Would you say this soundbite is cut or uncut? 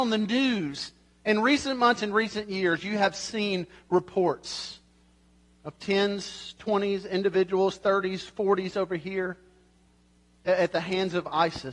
uncut